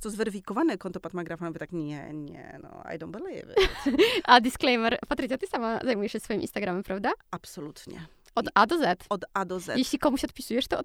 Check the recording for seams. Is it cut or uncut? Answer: uncut